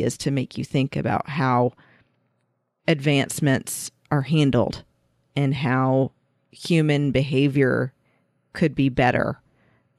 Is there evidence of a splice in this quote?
no; 0 cuts

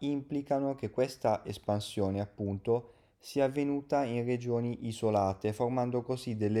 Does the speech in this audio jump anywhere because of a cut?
no; 0 cuts

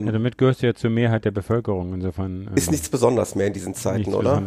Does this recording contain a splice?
no; 0 cuts

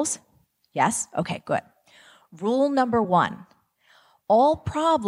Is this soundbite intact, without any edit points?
yes; 0 cuts

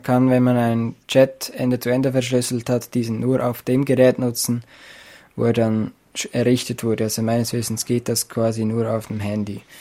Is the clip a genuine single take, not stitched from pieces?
no; 1 cut; at 1.0 s

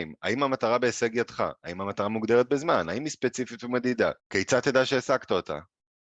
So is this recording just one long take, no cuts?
no; 1 cut; at 4.2 s

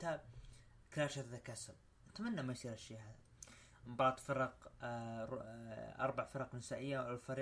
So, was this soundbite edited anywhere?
no; 0 cuts

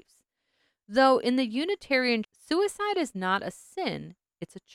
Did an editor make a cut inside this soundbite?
yes; 1 cut; at 2.2 s

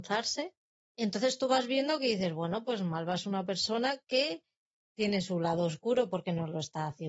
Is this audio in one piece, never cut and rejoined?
yes; 0 cuts

